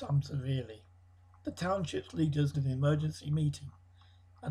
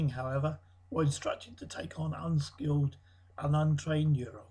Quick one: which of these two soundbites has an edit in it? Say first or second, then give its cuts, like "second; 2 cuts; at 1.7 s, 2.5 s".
first; 2 cuts; at 1.2 s, 2.5 s